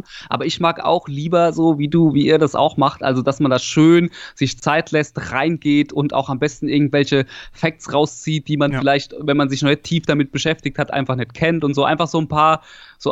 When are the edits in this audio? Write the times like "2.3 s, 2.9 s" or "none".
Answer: none